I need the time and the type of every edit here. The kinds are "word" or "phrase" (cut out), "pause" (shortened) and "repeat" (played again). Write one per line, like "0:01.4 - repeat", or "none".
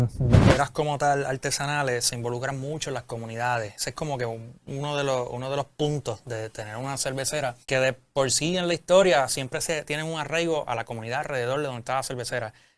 0:07.6 - pause